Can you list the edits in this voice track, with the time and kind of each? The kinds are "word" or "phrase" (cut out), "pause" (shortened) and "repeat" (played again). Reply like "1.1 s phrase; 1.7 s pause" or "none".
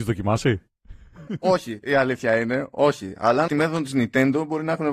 1.3 s word; 3.5 s word

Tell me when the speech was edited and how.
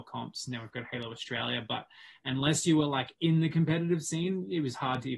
none

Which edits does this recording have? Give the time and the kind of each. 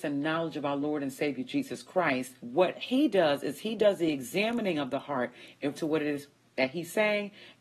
2.4 s pause; 5.7 s phrase

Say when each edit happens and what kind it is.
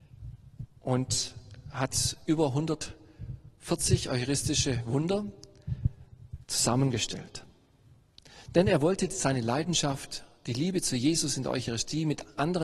none

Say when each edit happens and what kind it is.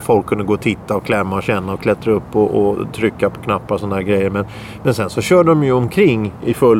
none

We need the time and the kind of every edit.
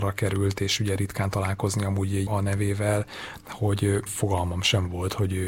2.3 s word; 4.1 s word

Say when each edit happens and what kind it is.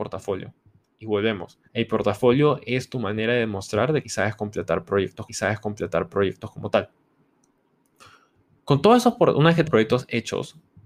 1.7 s pause; 4.0 s phrase; 5.3 s repeat; 9.7 s phrase

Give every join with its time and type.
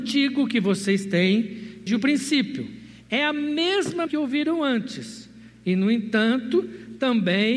1.9 s word; 4.1 s word

